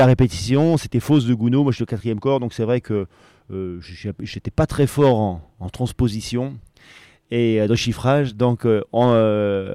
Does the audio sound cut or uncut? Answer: uncut